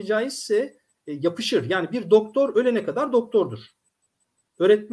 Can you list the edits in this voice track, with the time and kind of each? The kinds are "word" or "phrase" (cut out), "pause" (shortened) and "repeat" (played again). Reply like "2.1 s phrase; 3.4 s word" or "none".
none

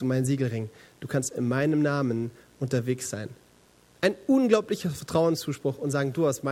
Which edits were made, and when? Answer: none

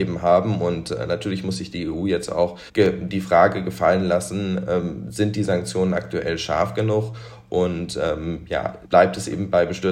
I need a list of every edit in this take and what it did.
2.7 s pause; 8.8 s pause

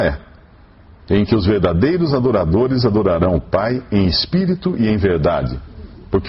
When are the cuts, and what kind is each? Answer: none

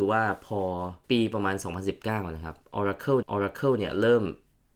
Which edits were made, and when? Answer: 1.0 s pause; 3.2 s repeat

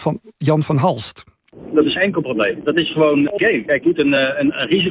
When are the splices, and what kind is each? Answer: 2.0 s word; 3.4 s word; 3.8 s word

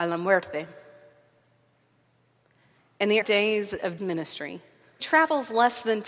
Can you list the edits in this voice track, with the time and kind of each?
3.2 s word; 4.0 s word; 5.0 s word

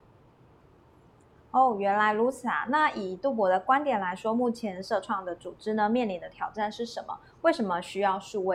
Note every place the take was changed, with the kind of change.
none

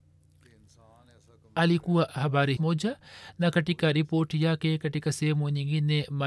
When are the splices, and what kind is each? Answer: 2.1 s word; 2.6 s phrase

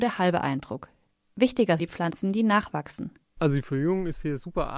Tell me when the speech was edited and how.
1.8 s word; 3.2 s pause

